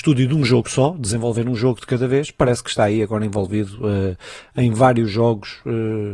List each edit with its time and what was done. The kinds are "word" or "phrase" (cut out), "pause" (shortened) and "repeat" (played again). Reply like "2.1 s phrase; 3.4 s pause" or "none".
none

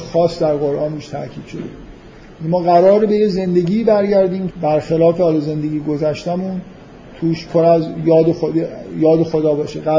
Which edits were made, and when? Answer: 4.5 s word

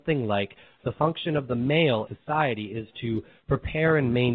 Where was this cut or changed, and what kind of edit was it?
2.1 s word

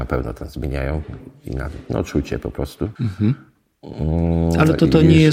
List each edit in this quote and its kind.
3.0 s pause

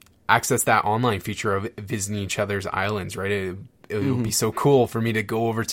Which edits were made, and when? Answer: none

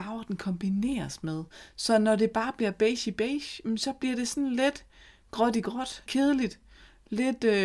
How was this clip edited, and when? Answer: 6.1 s word

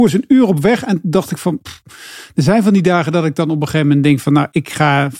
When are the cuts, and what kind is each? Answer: none

